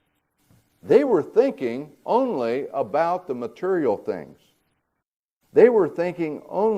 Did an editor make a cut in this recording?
no; 0 cuts

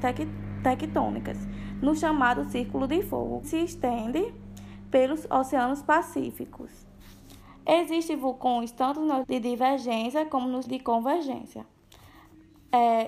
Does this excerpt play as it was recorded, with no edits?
no; 3 cuts; at 3.4 s, 9.2 s, 10.7 s

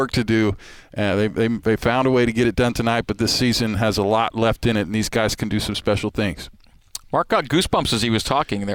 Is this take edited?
no; 0 cuts

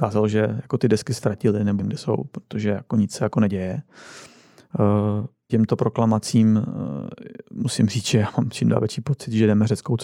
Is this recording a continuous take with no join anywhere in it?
no; 4 cuts; at 1.2 s, 1.8 s, 5.5 s, 7.4 s

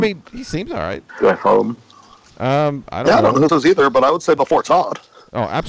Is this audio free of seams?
no; 1 cut; at 3.5 s

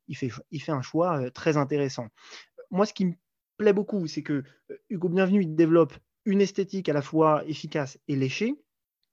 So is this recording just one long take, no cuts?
yes; 0 cuts

